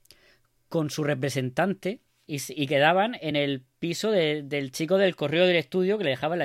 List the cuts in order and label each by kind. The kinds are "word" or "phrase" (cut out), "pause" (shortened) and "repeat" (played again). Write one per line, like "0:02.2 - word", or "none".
none